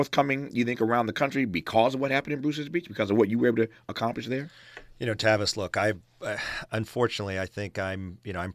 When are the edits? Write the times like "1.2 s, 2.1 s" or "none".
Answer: none